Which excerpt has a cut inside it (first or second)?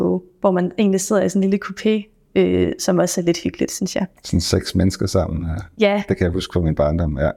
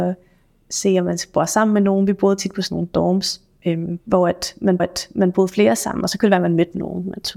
second